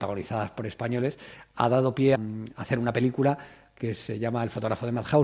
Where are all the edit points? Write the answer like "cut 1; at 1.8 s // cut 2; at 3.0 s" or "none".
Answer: cut 1; at 2.1 s